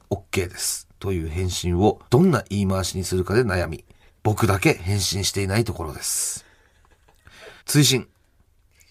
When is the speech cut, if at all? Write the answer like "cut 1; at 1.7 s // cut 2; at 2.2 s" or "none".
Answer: cut 1; at 0.9 s // cut 2; at 2.0 s // cut 3; at 4.1 s // cut 4; at 7.6 s